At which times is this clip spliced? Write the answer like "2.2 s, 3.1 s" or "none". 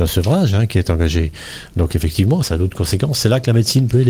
2.4 s